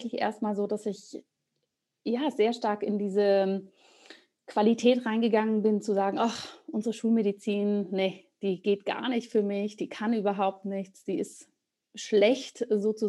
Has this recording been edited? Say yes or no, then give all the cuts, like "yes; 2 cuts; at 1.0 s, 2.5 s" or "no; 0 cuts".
no; 0 cuts